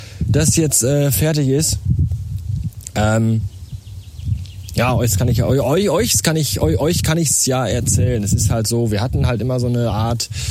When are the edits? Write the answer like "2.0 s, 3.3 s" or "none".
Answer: none